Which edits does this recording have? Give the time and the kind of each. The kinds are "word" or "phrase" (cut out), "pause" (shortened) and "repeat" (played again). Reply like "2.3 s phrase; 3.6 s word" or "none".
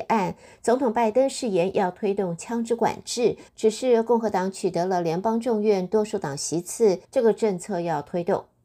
3.5 s pause; 7.0 s pause